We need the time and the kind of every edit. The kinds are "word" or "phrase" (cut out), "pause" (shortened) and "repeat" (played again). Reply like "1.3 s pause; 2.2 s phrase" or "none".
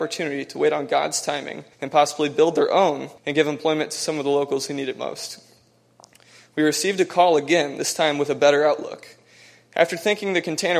1.7 s pause; 3.2 s pause